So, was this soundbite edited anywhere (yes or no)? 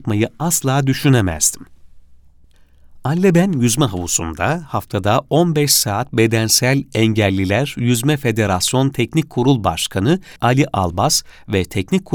yes